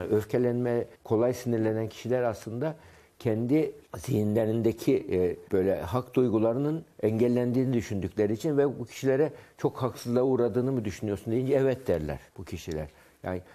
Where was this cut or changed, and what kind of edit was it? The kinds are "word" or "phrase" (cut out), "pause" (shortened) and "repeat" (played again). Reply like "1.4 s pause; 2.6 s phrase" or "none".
0.9 s pause; 3.9 s pause; 5.5 s pause; 6.9 s pause; 12.3 s pause